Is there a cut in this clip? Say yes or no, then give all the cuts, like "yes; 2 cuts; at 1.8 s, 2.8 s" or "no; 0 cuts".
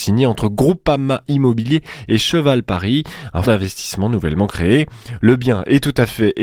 yes; 1 cut; at 3.4 s